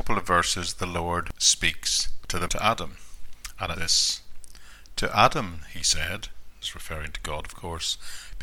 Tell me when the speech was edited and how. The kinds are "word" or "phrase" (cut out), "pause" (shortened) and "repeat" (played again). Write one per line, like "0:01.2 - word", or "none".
0:02.5 - word
0:03.8 - word
0:06.6 - word